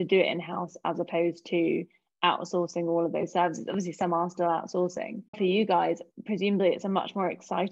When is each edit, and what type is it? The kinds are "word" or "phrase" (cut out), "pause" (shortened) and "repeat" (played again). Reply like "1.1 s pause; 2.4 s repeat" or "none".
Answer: 5.3 s pause